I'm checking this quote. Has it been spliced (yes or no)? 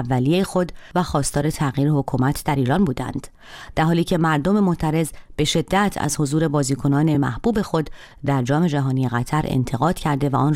no